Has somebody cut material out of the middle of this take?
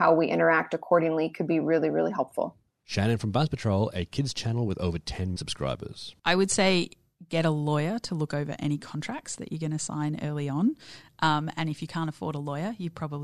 yes; 1 cut; at 5.4 s

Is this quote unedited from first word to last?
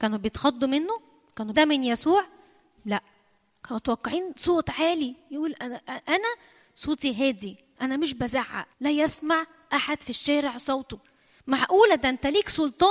no; 2 cuts; at 1.5 s, 8.7 s

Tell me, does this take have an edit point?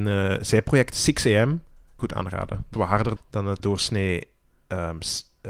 yes; 4 cuts; at 2.0 s, 2.7 s, 3.2 s, 3.6 s

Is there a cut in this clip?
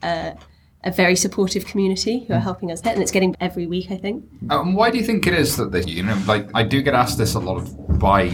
yes; 4 cuts; at 2.8 s, 3.3 s, 5.8 s, 6.5 s

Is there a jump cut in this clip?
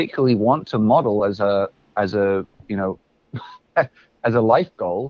no; 0 cuts

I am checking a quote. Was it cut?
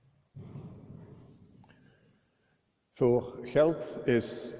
no; 0 cuts

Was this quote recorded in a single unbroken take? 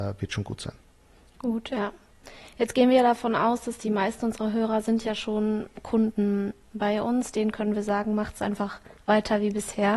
yes; 0 cuts

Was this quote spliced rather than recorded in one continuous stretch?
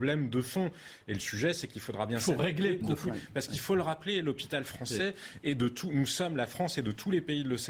yes; 1 cut; at 2.8 s

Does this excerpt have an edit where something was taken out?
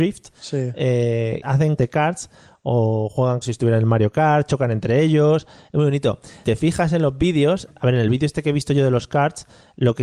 yes; 4 cuts; at 1.4 s, 1.8 s, 3.4 s, 6.4 s

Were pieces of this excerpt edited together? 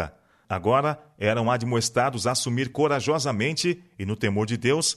no; 0 cuts

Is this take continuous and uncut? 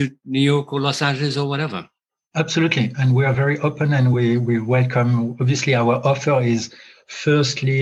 yes; 0 cuts

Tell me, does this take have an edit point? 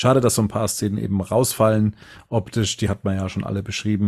no; 0 cuts

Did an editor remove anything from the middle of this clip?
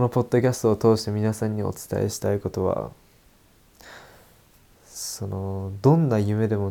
no; 0 cuts

